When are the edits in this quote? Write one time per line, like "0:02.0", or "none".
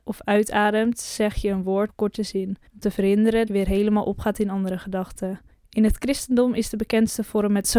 0:01.9
0:02.7
0:03.5
0:05.5